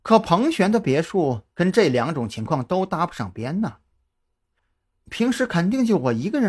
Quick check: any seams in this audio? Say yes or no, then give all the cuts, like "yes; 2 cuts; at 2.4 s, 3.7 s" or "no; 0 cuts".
no; 0 cuts